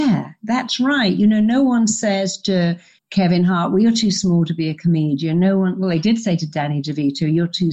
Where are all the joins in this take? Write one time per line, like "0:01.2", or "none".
0:03.0